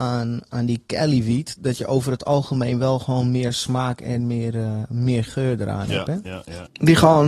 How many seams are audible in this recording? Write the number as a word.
zero